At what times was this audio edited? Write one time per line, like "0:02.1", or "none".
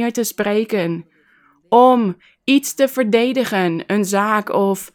none